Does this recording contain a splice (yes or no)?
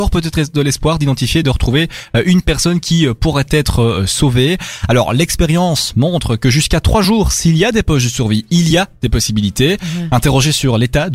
no